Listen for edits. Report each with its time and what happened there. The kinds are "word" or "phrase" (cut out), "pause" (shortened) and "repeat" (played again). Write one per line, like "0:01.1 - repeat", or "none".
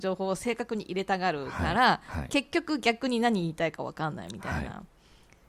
none